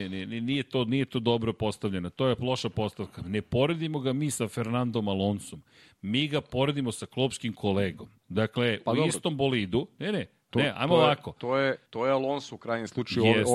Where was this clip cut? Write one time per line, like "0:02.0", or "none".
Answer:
0:08.2
0:11.9